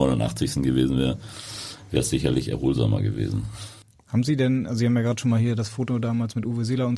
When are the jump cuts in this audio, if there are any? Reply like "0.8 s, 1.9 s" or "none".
3.8 s